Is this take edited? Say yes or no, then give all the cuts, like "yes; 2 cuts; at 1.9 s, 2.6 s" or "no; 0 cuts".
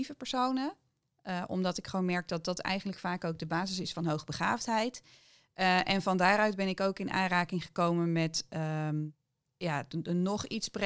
no; 0 cuts